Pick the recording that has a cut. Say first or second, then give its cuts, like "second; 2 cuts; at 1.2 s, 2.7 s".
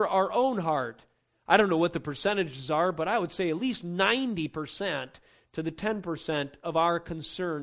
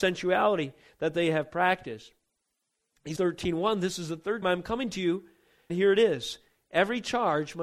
second; 3 cuts; at 3.2 s, 4.4 s, 5.7 s